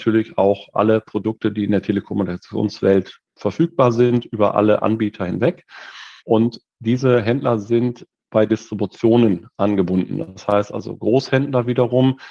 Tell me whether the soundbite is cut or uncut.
cut